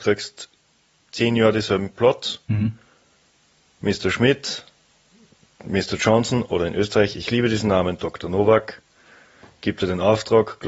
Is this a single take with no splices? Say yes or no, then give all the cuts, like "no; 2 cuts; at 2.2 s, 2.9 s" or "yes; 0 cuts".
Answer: yes; 0 cuts